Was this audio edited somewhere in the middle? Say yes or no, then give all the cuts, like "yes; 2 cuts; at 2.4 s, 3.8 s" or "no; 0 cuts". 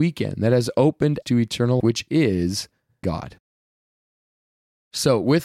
yes; 3 cuts; at 1.2 s, 1.8 s, 3.0 s